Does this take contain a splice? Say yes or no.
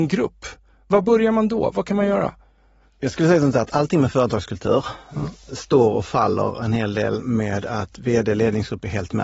no